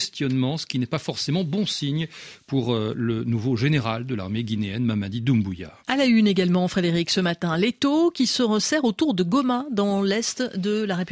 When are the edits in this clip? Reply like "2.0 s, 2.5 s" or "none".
5.8 s